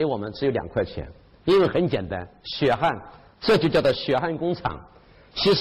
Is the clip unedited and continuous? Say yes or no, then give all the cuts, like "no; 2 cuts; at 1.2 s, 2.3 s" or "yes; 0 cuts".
yes; 0 cuts